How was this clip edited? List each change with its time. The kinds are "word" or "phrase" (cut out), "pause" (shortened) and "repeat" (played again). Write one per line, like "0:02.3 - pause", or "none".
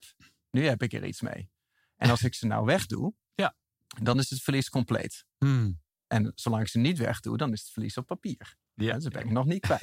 none